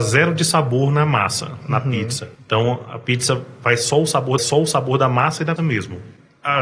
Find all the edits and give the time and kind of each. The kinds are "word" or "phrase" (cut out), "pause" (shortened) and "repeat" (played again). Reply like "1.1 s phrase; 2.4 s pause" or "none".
2.3 s pause; 4.4 s repeat; 5.6 s word